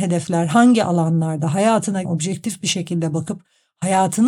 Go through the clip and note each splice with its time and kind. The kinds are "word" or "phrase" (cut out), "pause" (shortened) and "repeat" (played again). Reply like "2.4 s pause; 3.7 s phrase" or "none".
2.0 s word